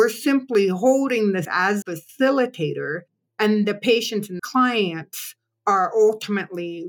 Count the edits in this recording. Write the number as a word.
four